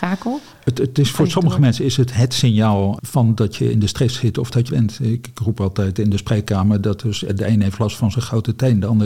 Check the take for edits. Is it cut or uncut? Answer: cut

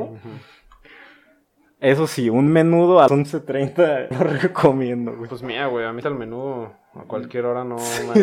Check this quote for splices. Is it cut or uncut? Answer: cut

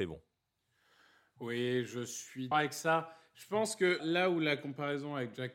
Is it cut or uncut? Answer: cut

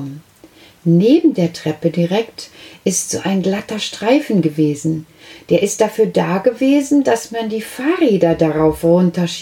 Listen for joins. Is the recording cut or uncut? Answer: uncut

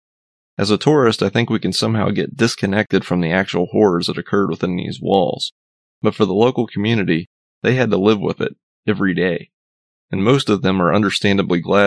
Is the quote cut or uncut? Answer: uncut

